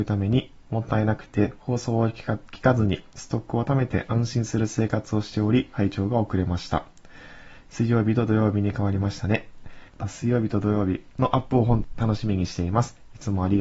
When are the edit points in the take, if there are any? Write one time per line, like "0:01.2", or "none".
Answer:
0:09.9